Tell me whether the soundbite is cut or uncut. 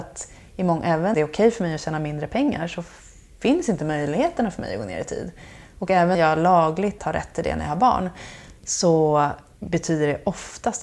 cut